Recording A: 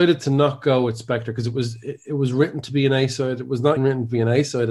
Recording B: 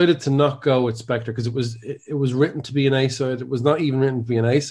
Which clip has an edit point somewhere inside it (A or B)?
A